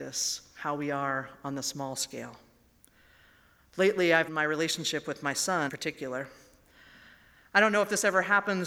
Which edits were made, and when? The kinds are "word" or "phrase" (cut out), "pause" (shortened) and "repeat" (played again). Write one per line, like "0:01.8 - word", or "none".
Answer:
0:04.3 - phrase
0:05.7 - word